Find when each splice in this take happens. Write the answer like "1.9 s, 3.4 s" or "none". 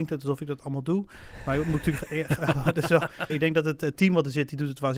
3.3 s